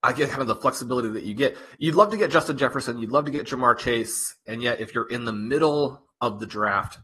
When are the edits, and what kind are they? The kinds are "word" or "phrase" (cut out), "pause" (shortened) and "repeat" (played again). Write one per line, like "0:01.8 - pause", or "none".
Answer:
none

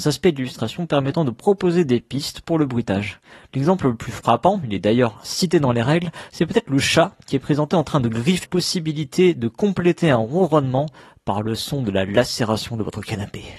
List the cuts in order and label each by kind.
0:08.4 - phrase

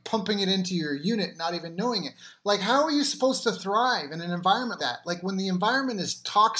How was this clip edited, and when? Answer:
0:04.8 - word

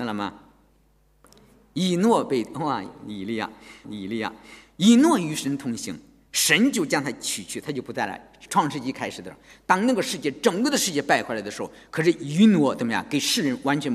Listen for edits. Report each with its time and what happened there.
0:03.8 - repeat

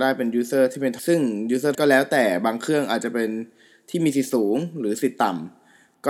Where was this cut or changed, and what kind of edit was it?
0:01.0 - word
0:01.7 - word

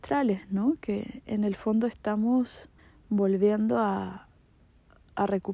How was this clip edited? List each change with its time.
0:02.8 - pause

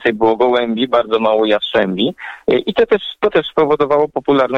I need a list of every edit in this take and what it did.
none

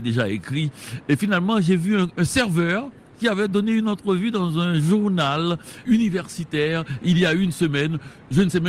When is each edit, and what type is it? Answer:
0:05.8 - word

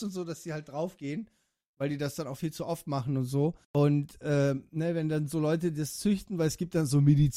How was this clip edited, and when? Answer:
0:03.6 - pause

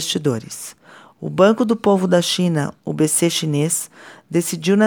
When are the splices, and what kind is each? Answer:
none

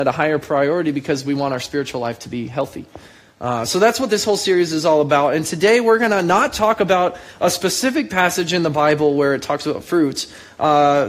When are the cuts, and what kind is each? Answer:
none

